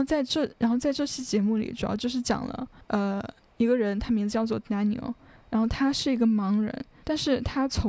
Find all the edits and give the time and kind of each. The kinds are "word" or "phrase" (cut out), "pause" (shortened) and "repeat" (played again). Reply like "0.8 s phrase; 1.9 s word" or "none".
none